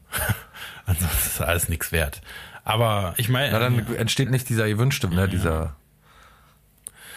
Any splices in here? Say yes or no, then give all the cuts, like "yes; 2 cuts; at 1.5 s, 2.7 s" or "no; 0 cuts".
yes; 3 cuts; at 3.1 s, 4.3 s, 5.1 s